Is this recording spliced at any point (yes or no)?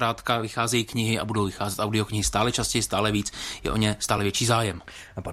no